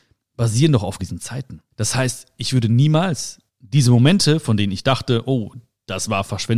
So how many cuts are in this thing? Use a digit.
3